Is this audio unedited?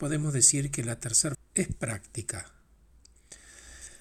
no; 1 cut; at 1.3 s

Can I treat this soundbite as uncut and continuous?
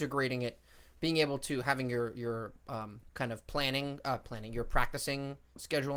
no; 1 cut; at 3.1 s

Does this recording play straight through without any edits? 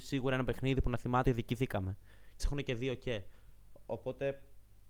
no; 2 cuts; at 1.2 s, 2.4 s

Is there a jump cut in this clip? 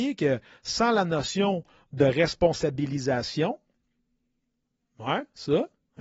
no; 0 cuts

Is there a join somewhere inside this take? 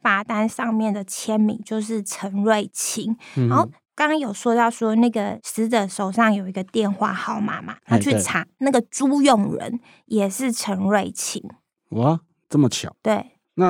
no; 0 cuts

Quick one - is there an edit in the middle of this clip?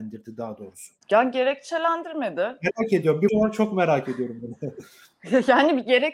yes; 2 cuts; at 1.0 s, 3.3 s

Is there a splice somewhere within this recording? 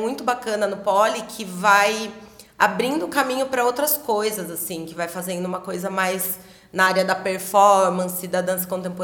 no; 0 cuts

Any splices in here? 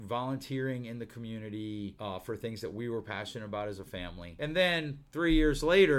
no; 0 cuts

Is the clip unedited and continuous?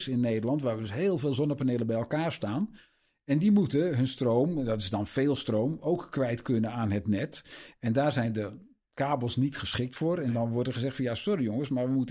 yes; 0 cuts

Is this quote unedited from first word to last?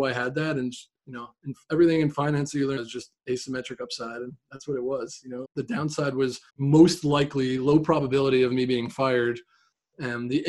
no; 4 cuts; at 1.0 s, 2.8 s, 5.4 s, 6.5 s

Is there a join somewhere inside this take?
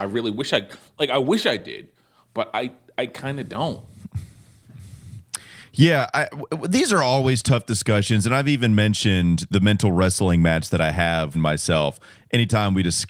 yes; 1 cut; at 11.3 s

